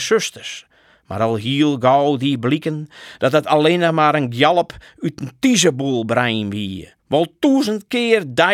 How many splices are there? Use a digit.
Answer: 1